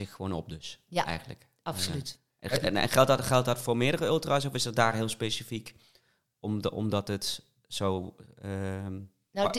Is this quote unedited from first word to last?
yes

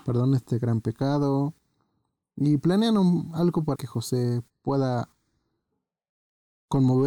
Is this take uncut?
no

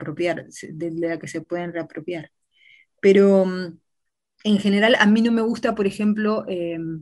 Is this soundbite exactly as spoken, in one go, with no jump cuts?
yes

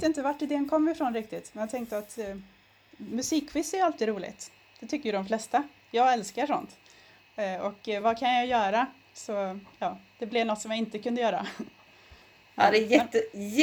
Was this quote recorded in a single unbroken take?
yes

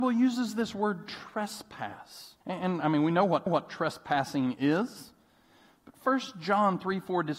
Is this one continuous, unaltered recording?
no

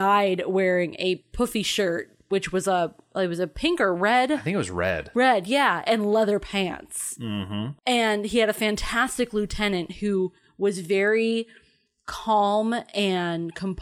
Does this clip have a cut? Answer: no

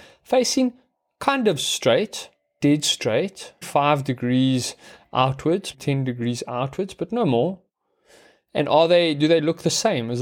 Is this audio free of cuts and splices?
no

